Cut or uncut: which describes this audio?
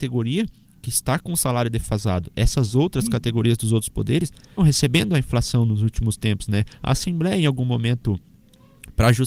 cut